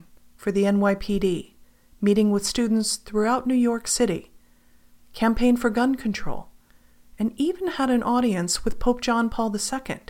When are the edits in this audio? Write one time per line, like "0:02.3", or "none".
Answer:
none